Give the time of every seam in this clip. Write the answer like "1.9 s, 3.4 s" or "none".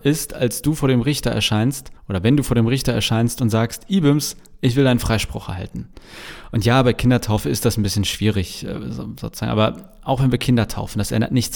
2.0 s